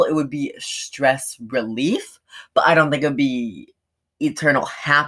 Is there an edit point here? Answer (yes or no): no